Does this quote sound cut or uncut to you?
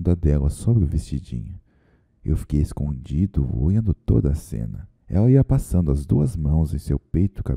cut